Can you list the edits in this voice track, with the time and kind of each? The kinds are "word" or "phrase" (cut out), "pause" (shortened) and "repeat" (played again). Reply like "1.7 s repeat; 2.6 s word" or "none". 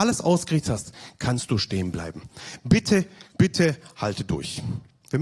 3.3 s phrase